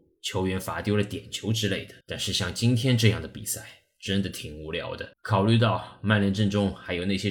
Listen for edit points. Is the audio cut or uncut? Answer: cut